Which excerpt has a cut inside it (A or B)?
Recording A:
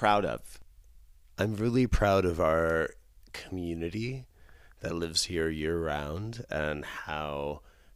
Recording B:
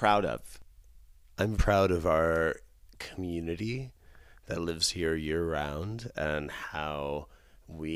B